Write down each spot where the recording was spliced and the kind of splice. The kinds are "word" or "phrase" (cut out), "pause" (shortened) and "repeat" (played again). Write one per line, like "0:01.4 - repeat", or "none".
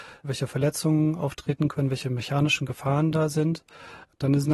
none